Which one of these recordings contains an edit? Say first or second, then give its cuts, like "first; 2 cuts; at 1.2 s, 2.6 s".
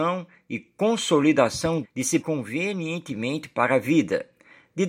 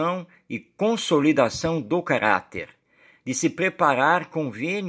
first; 2 cuts; at 1.8 s, 2.2 s